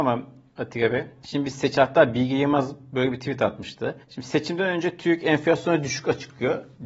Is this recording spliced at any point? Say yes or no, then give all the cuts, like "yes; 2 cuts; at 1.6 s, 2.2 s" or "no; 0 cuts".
yes; 1 cut; at 4.0 s